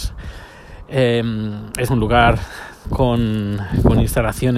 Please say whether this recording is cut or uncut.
cut